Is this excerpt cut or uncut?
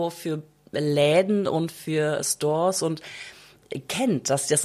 uncut